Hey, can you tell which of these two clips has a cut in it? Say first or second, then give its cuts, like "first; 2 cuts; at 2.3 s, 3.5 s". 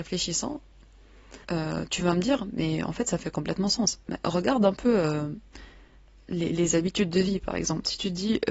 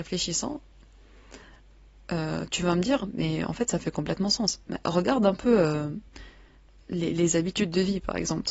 first; 1 cut; at 1.4 s